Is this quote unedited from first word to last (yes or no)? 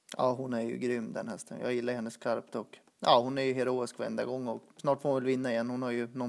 no